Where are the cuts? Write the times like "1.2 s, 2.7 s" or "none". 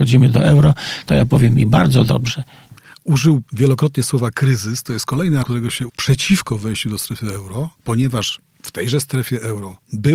3.4 s, 5.4 s, 5.9 s, 7.7 s

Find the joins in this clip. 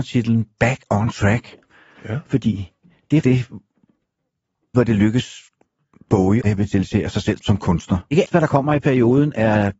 3.2 s, 4.7 s, 6.4 s, 7.4 s, 8.2 s

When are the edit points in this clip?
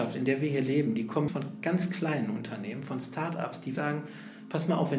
1.3 s, 3.7 s

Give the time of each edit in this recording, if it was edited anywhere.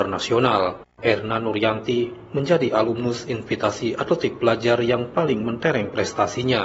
0.9 s

